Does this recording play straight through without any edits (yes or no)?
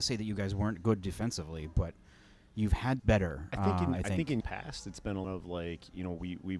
no